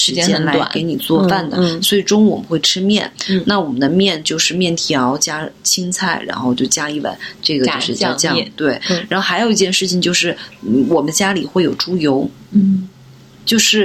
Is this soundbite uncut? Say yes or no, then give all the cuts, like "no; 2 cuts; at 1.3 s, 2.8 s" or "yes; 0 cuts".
yes; 0 cuts